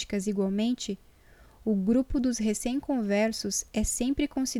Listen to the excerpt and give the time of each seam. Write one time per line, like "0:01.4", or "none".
none